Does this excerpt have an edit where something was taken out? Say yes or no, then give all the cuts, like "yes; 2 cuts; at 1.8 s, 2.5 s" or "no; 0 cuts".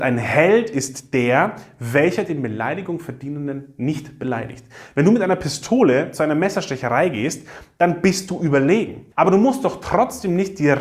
yes; 1 cut; at 9.1 s